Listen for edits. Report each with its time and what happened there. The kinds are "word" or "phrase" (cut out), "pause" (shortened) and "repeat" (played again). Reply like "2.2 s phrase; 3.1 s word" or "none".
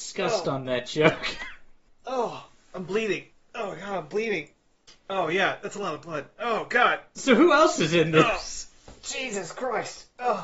1.9 s pause; 3.3 s pause; 4.9 s pause